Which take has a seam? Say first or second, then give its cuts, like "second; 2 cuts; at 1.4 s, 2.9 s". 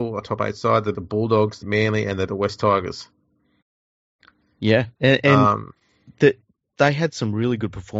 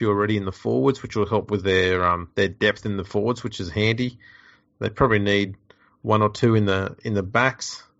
first; 4 cuts; at 0.9 s, 1.6 s, 2.3 s, 5.0 s